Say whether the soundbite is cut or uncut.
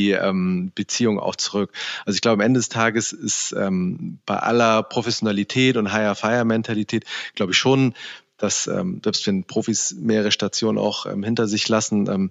uncut